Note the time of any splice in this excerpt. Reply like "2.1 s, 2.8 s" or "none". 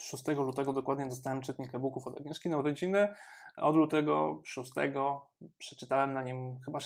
none